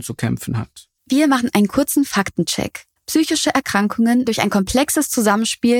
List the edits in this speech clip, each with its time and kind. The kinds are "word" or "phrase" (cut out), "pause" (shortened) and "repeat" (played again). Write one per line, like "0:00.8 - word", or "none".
0:01.0 - pause
0:03.0 - pause
0:04.2 - word